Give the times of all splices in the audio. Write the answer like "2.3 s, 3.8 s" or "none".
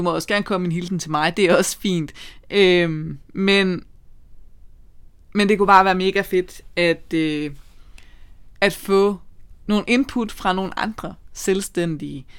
8.5 s